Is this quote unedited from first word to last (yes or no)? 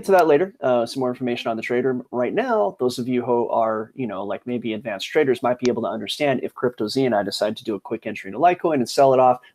yes